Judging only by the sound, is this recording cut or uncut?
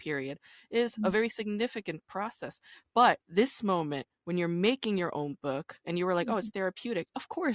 cut